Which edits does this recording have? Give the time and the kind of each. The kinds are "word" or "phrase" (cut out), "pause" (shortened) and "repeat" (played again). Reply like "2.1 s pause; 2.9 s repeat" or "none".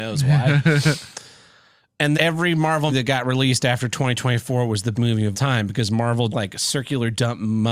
2.1 s word; 2.9 s word; 4.9 s word; 5.3 s word; 6.3 s word